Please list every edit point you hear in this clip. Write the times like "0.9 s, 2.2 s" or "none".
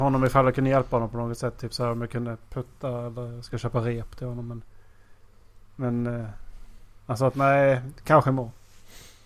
none